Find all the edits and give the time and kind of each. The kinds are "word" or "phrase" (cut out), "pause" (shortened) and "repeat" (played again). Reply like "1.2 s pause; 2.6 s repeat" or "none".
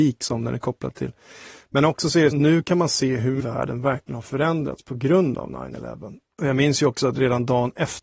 2.3 s phrase; 3.4 s word